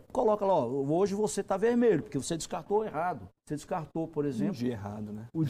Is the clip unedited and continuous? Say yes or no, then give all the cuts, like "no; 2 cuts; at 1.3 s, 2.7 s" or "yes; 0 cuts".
no; 1 cut; at 3.4 s